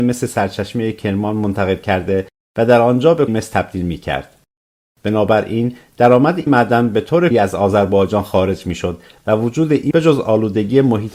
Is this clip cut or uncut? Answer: cut